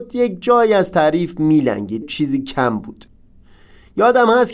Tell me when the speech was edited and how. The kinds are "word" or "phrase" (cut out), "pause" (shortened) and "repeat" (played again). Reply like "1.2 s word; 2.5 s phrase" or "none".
2.0 s word